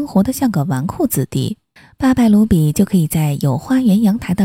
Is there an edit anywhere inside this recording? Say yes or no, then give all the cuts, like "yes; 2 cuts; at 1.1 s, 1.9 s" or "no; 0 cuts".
yes; 1 cut; at 1.8 s